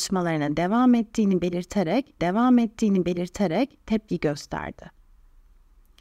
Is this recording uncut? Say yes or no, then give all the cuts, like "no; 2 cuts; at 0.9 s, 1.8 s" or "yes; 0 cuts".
no; 1 cut; at 2.2 s